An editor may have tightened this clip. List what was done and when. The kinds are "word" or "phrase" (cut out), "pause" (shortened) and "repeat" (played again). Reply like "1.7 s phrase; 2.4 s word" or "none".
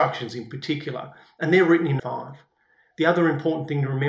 2.0 s phrase